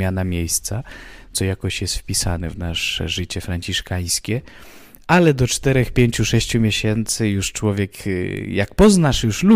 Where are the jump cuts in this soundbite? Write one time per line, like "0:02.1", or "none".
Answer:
none